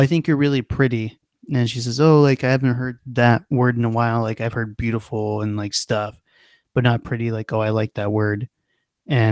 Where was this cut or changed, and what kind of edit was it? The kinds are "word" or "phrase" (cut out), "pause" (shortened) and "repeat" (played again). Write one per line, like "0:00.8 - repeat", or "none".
none